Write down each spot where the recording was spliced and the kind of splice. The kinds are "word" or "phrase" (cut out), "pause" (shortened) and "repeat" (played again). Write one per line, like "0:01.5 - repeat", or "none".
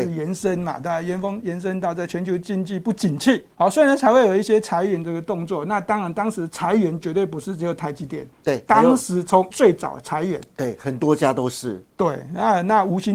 0:03.5 - pause
0:08.3 - pause
0:09.5 - word

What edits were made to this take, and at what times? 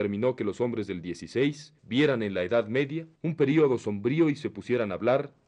0:01.8 - pause
0:03.2 - pause

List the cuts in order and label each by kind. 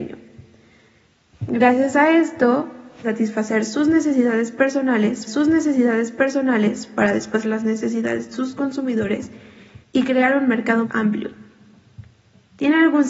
0:03.0 - word
0:05.3 - repeat
0:07.4 - word
0:08.3 - word
0:09.8 - pause
0:10.8 - word

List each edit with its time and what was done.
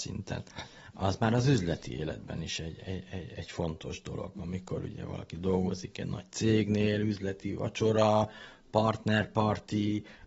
none

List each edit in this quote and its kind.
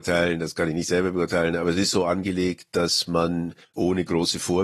0:03.6 - pause

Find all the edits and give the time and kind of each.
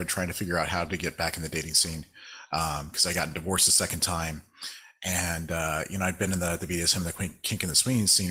none

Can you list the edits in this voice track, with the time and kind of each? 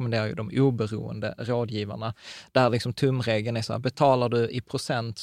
none

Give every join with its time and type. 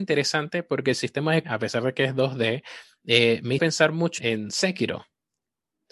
0:01.4 - word
0:03.6 - word
0:04.2 - word

